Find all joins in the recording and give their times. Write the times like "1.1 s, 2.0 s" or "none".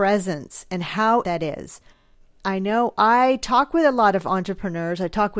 1.2 s

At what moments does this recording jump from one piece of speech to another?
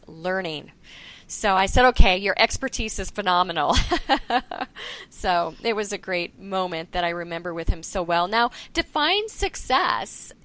none

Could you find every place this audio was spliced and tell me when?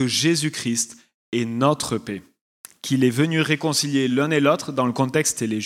none

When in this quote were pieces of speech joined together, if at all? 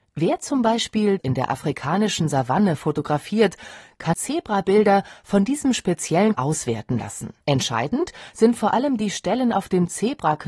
1.2 s, 4.1 s, 6.3 s, 7.4 s

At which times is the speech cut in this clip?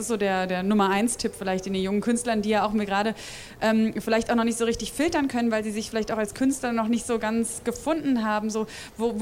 none

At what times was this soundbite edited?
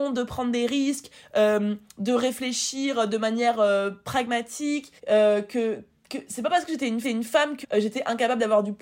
5.0 s, 7.0 s, 7.6 s

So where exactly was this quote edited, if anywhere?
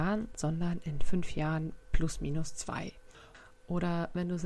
none

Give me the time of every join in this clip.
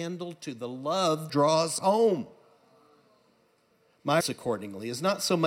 1.3 s, 1.8 s, 4.2 s

